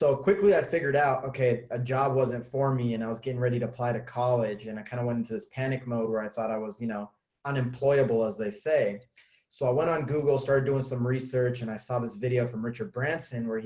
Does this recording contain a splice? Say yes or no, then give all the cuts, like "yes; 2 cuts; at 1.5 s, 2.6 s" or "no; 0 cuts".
no; 0 cuts